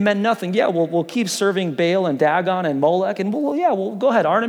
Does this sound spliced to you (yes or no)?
no